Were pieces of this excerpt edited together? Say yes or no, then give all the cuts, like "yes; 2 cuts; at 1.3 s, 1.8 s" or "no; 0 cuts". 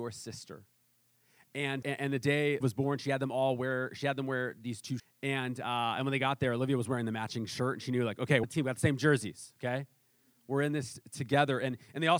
yes; 4 cuts; at 1.8 s, 2.6 s, 5.0 s, 8.4 s